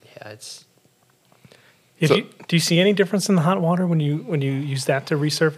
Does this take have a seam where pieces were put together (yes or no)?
no